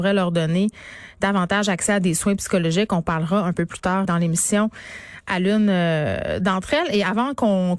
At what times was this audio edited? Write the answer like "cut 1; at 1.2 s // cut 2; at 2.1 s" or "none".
cut 1; at 4.0 s